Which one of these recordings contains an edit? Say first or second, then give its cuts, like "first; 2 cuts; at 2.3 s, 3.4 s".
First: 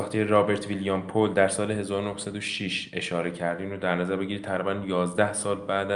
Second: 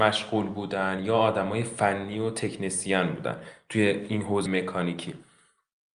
second; 1 cut; at 4.5 s